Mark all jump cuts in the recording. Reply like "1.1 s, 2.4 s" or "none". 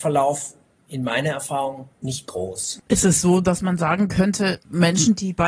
1.9 s